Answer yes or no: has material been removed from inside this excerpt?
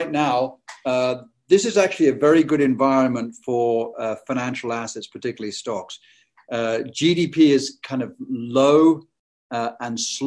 no